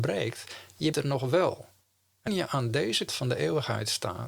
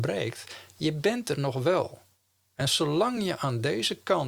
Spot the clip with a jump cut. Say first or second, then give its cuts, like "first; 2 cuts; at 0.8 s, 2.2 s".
first; 3 cuts; at 0.9 s, 2.3 s, 3.1 s